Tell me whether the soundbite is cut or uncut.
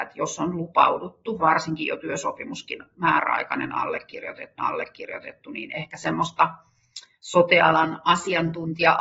cut